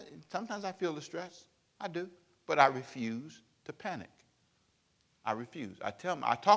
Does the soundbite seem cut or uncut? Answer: uncut